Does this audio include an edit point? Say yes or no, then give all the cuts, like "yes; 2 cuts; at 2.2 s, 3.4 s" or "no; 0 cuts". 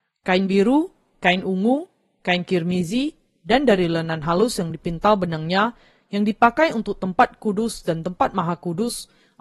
no; 0 cuts